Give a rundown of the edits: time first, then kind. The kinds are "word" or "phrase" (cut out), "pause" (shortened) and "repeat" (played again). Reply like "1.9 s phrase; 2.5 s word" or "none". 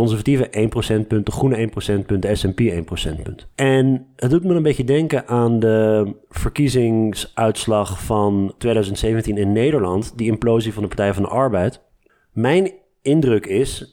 3.5 s pause; 8.6 s word